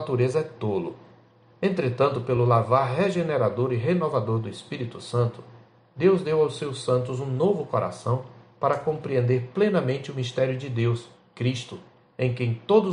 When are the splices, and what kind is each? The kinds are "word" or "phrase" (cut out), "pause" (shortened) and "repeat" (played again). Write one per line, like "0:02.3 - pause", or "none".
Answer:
none